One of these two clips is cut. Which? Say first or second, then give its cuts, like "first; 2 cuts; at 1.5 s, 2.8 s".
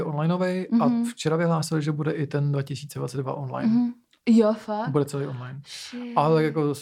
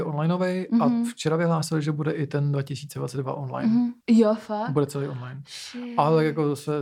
second; 1 cut; at 4.0 s